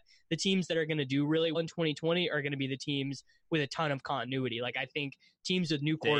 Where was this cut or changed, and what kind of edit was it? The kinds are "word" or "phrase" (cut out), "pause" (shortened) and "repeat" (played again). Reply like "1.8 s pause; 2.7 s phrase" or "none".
1.5 s word